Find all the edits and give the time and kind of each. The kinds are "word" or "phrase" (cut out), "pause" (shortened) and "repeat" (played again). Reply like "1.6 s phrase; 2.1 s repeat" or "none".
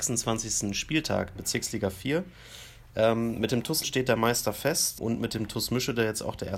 1.4 s word; 3.8 s word; 5.0 s word